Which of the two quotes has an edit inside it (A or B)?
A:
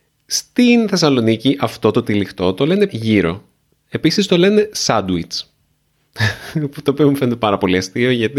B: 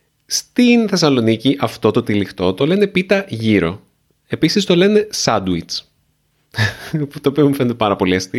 A